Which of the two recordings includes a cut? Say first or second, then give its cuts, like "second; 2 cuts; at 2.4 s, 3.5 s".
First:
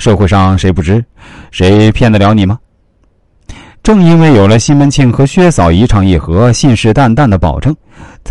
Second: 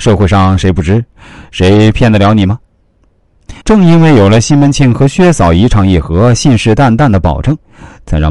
second; 1 cut; at 3.6 s